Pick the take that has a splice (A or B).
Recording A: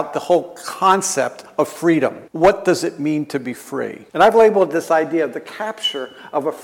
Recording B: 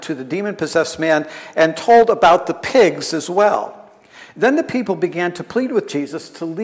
A